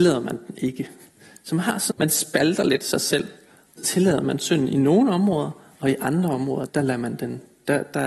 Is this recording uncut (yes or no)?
no